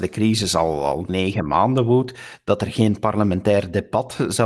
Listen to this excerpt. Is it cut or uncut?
uncut